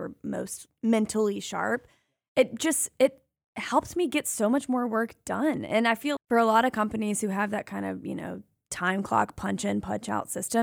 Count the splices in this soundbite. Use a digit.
1